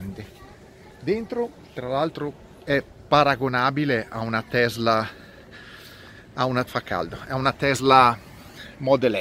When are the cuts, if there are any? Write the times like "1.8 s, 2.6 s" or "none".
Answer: 6.7 s